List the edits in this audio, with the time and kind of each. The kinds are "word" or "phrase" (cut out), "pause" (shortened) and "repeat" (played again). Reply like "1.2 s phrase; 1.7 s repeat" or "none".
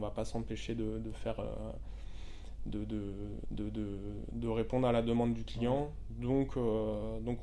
3.4 s repeat